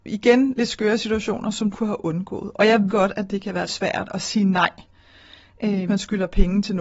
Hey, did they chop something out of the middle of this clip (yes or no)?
yes